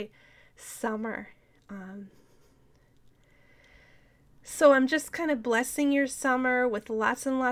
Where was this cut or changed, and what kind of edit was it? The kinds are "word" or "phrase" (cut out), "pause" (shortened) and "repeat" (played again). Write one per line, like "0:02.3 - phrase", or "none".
none

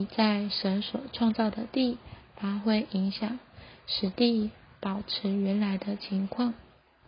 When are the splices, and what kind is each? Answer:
none

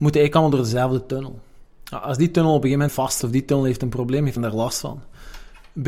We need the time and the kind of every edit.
0:02.9 - word
0:03.2 - word
0:04.4 - word

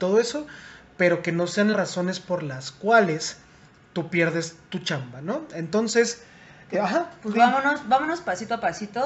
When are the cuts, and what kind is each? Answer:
0:01.7 - word
0:06.7 - word

